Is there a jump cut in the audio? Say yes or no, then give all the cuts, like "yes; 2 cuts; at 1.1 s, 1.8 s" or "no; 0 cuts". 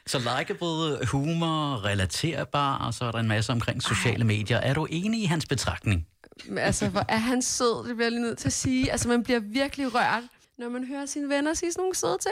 yes; 1 cut; at 10.4 s